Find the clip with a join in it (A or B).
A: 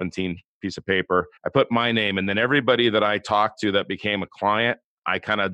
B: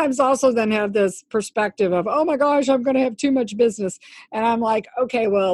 A